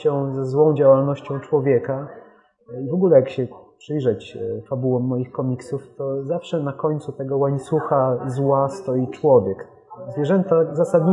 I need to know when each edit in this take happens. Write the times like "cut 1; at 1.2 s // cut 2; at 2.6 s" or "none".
none